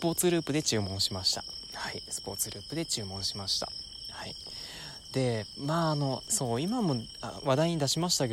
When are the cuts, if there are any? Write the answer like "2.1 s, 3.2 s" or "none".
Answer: 6.2 s